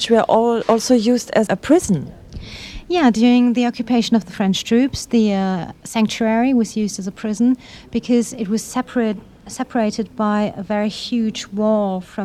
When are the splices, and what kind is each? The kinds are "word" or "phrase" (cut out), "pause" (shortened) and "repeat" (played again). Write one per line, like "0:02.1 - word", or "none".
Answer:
0:01.5 - word